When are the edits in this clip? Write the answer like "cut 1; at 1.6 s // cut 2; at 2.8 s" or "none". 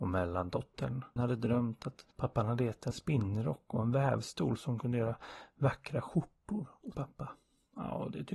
cut 1; at 1.2 s // cut 2; at 2.1 s // cut 3; at 2.9 s // cut 4; at 6.9 s

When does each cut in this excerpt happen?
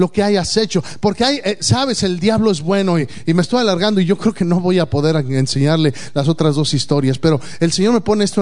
none

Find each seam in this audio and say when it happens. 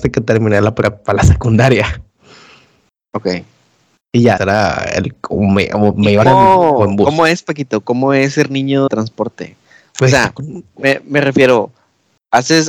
cut 1; at 1.1 s // cut 2; at 4.4 s // cut 3; at 6.2 s // cut 4; at 8.9 s

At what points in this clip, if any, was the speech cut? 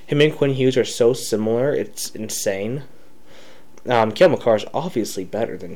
none

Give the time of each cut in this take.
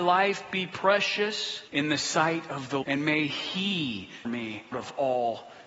cut 1; at 1.7 s // cut 2; at 2.8 s // cut 3; at 4.2 s // cut 4; at 4.7 s

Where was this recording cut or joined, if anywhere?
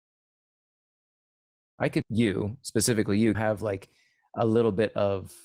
cut 1; at 2.0 s // cut 2; at 3.3 s

